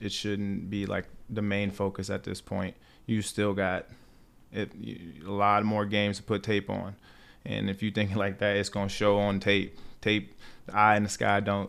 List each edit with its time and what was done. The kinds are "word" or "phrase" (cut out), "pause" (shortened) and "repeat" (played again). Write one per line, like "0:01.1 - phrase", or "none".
none